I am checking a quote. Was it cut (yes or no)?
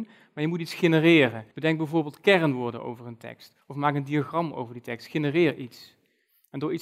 yes